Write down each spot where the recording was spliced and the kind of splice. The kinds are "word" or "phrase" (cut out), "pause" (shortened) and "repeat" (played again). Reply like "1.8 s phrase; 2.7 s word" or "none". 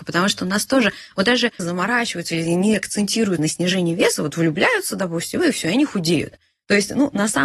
1.6 s phrase; 3.4 s phrase